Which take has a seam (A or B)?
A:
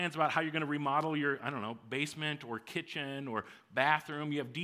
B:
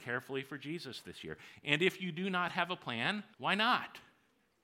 B